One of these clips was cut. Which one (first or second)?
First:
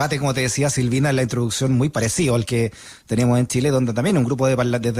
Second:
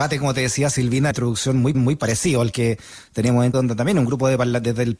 second